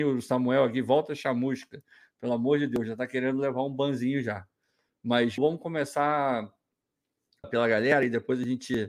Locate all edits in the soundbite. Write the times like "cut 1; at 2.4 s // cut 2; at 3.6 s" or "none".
cut 1; at 5.4 s // cut 2; at 7.4 s